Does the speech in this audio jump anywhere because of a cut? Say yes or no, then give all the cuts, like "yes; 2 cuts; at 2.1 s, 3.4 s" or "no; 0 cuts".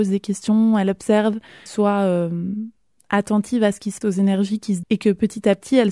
yes; 3 cuts; at 1.7 s, 4.0 s, 4.8 s